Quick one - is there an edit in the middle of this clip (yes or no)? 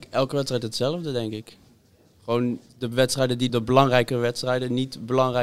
yes